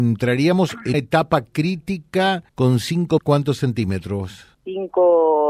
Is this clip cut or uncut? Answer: cut